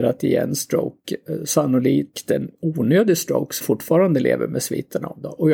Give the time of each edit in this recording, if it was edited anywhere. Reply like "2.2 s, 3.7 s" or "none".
3.6 s